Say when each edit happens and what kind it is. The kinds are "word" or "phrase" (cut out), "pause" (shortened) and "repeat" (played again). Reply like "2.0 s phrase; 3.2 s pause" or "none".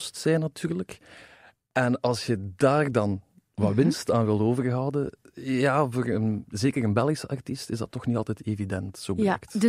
none